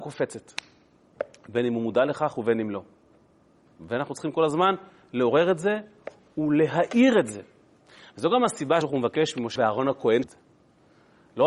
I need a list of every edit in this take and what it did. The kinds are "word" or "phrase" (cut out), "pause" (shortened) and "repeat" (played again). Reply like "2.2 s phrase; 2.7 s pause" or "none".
8.8 s word; 9.6 s word; 10.2 s word